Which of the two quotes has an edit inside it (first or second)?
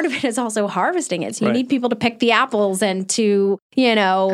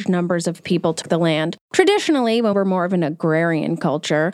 second